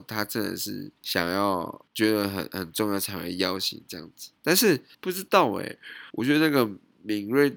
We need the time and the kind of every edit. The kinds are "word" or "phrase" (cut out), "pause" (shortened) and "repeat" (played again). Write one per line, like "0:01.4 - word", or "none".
0:01.0 - pause
0:01.9 - pause
0:04.4 - pause
0:04.9 - pause
0:06.1 - pause